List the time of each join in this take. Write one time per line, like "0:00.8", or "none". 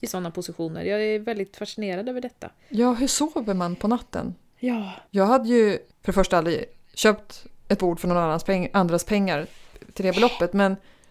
0:05.1
0:05.9
0:07.6